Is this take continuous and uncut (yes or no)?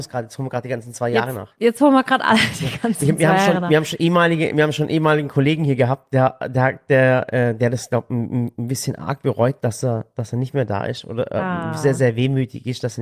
yes